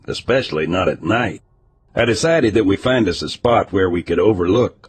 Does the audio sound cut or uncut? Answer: uncut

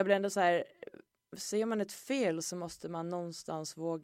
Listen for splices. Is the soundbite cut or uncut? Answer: uncut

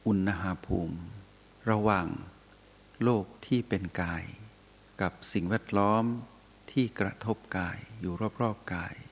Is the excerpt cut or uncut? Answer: cut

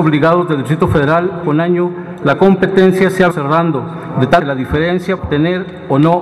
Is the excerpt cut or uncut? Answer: cut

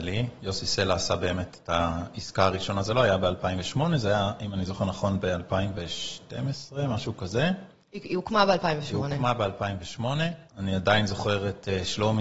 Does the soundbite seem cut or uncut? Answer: cut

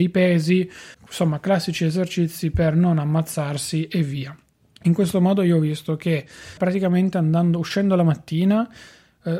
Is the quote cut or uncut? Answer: cut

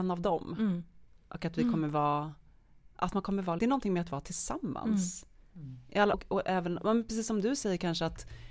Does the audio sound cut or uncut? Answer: cut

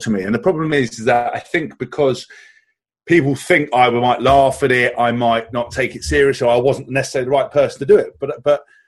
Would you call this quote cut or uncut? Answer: uncut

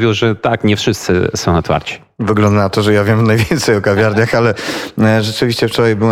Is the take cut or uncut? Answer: uncut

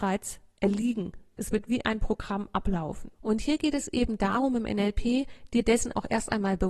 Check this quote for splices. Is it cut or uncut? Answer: cut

